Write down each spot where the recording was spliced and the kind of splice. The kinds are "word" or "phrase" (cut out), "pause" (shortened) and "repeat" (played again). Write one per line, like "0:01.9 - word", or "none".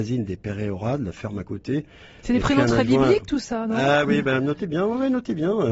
none